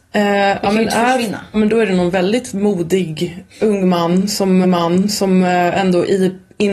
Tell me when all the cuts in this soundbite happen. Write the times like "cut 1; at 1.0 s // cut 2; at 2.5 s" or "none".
cut 1; at 1.5 s // cut 2; at 3.5 s // cut 3; at 4.6 s